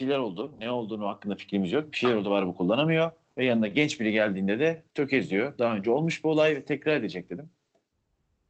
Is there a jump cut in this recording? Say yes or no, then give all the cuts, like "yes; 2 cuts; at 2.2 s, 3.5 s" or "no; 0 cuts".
yes; 2 cuts; at 3.3 s, 4.9 s